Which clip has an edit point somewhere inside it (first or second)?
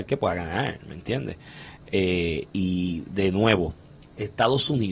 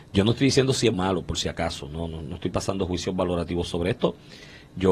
second